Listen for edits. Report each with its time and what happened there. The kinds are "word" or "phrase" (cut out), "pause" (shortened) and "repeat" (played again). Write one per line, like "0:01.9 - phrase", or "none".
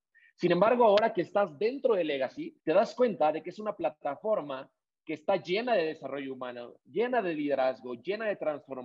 0:02.6 - pause

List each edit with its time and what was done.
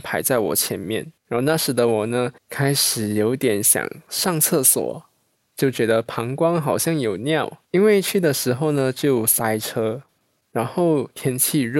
0:01.2 - pause
0:02.4 - pause
0:05.3 - pause
0:07.6 - pause

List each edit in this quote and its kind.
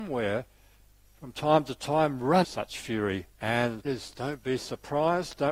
0:02.4 - word
0:03.3 - pause
0:03.8 - word

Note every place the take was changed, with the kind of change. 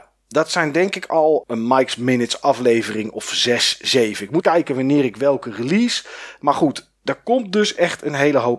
0:01.4 - word
0:04.4 - word

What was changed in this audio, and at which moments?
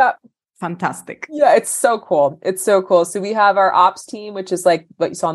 none

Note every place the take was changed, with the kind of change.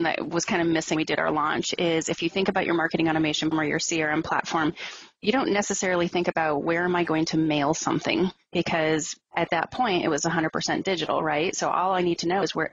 0:01.0 - word
0:03.5 - word

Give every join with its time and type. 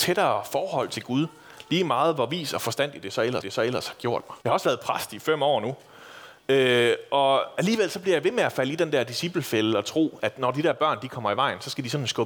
0:03.4 - repeat
0:04.4 - pause
0:10.2 - word

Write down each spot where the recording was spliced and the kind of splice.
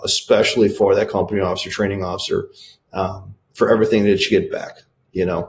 none

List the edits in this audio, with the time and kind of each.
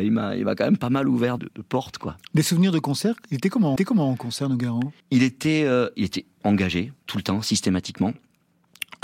0:01.4 - word
0:03.8 - repeat
0:05.0 - pause
0:07.0 - pause

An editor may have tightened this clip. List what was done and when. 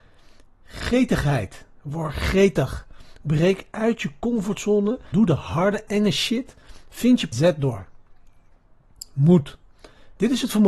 0:05.1 - word
0:07.3 - phrase

